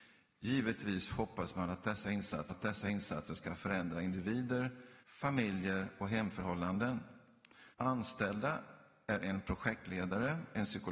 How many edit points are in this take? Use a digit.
3